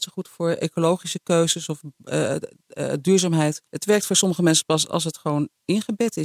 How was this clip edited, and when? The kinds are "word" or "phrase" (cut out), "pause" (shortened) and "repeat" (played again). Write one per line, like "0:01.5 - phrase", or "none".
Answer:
0:03.7 - pause